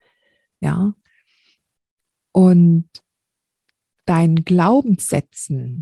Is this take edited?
no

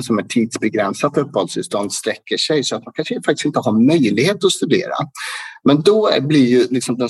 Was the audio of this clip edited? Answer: no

